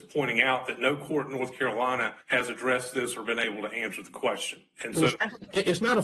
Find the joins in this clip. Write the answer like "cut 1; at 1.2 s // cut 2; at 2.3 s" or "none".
cut 1; at 2.2 s